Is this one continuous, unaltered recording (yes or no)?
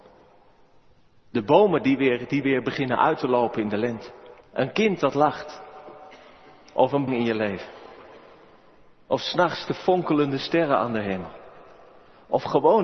no